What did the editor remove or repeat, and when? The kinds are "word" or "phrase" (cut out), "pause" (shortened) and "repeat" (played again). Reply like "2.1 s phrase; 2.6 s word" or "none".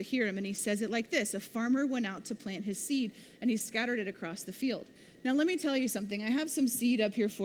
5.0 s pause

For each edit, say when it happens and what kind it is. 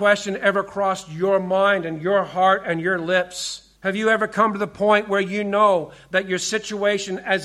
3.8 s pause

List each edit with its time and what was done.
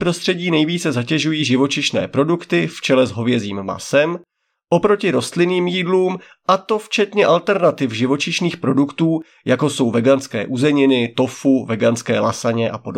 none

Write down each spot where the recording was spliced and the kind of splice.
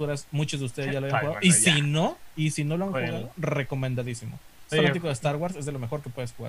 4.7 s word

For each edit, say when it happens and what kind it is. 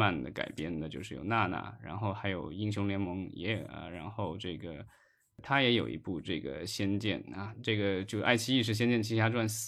none

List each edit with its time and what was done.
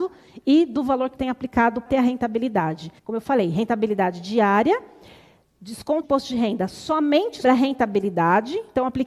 1.1 s word; 1.8 s word; 3.0 s pause; 6.0 s word; 7.4 s word

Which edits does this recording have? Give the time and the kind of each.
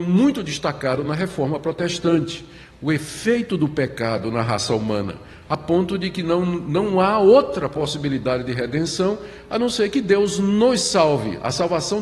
none

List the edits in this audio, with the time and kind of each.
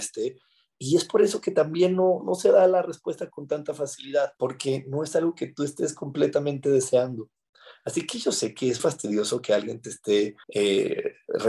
2.2 s word; 4.4 s pause; 8.8 s word; 10.4 s pause

